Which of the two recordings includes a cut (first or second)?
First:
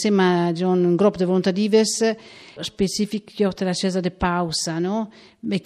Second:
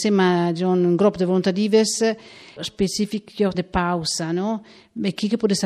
second